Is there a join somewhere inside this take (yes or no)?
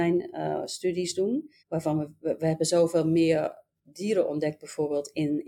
yes